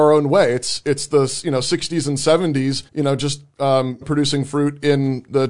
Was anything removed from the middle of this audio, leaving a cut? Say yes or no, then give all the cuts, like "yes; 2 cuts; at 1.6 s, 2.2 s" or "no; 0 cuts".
yes; 2 cuts; at 2.9 s, 4.0 s